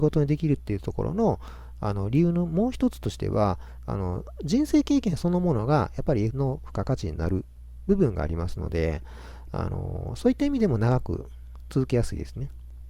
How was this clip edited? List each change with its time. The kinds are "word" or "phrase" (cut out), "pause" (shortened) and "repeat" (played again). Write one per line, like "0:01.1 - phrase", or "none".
0:06.3 - word

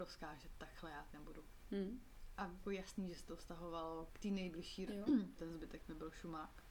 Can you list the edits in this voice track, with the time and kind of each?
0:01.1 - word
0:02.6 - word
0:04.1 - word
0:04.9 - word
0:05.4 - word

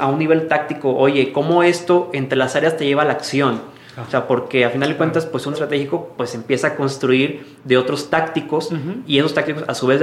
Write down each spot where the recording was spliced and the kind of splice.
0:05.5 - word

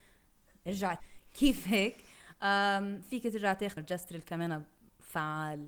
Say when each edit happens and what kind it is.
0:01.0 - word
0:03.8 - word

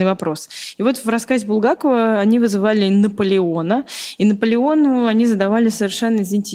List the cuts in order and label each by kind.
none

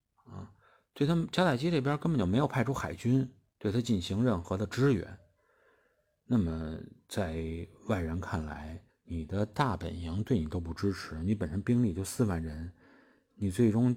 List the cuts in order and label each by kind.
0:08.9 - pause

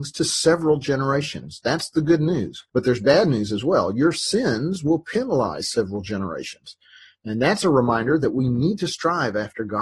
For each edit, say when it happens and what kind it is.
0:02.7 - pause

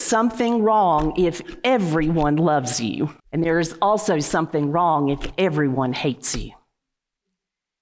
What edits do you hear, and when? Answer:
0:03.2 - pause

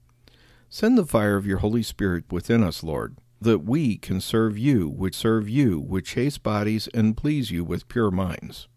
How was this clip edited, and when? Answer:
0:02.3 - word
0:03.4 - word
0:05.1 - repeat

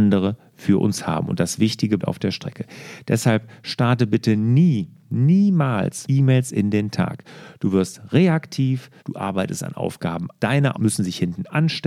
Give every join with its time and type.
0:02.0 - word
0:06.0 - word
0:09.0 - pause
0:10.4 - word
0:10.7 - word

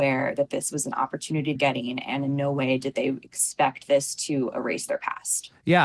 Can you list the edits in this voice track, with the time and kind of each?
0:01.6 - phrase

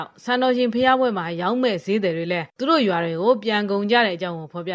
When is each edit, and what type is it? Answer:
0:02.5 - pause

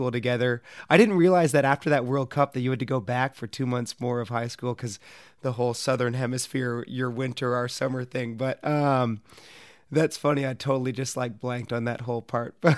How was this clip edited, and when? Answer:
none

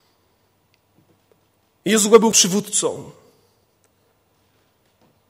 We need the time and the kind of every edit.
0:02.3 - word

